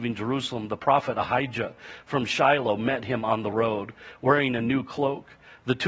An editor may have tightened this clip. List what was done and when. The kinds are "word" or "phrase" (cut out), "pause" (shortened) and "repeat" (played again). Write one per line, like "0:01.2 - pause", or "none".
none